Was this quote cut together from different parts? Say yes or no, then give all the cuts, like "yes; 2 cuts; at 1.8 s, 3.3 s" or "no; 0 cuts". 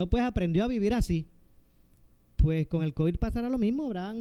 no; 0 cuts